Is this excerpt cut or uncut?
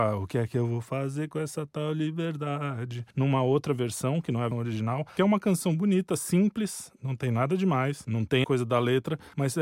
cut